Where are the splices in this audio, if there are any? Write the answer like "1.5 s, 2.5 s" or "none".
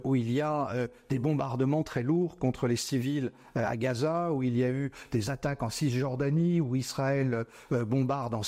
none

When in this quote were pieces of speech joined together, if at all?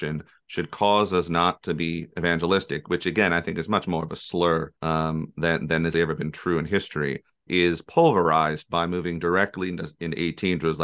4.8 s, 5.9 s, 7.5 s

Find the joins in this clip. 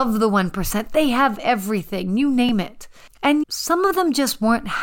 3.4 s

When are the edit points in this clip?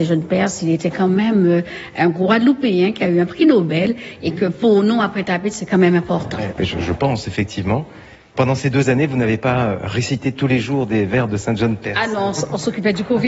none

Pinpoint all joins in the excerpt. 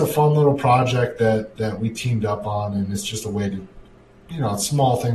none

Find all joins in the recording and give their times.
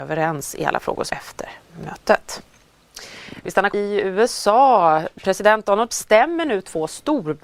1.1 s, 3.7 s, 5.9 s

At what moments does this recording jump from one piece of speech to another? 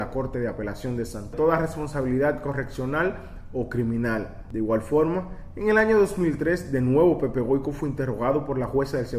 1.3 s

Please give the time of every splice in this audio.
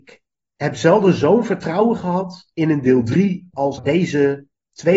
3.8 s

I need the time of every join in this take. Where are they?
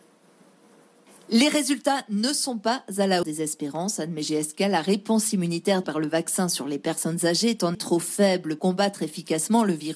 3.2 s, 5.8 s, 7.7 s, 8.6 s

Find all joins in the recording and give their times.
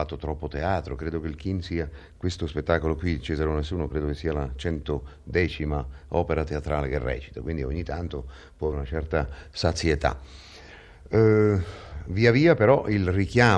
8.7 s

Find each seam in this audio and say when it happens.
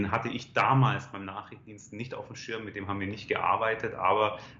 none

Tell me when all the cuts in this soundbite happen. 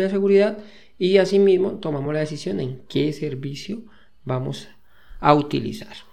none

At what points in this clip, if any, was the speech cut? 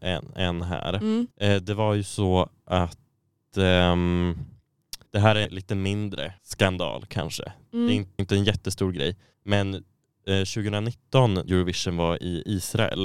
1.3 s, 5.1 s, 5.4 s, 6.4 s, 8.2 s, 9.3 s, 11.5 s

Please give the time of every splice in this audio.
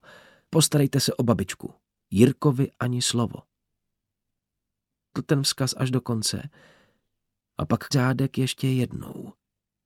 5.1 s, 7.9 s

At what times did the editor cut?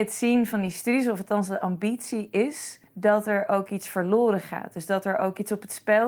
2.9 s

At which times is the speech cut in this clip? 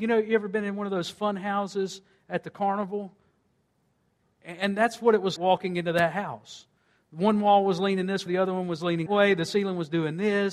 5.4 s, 8.3 s, 9.1 s

